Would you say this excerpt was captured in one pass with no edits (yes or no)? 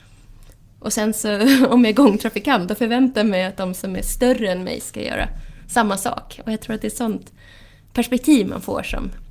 yes